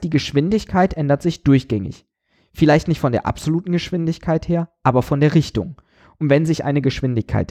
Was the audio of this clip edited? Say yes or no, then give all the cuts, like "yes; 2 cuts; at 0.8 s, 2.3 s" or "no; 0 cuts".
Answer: no; 0 cuts